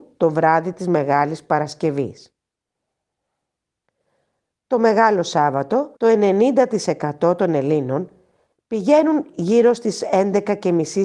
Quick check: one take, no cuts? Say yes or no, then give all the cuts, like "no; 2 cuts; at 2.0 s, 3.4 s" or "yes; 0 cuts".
no; 1 cut; at 6.0 s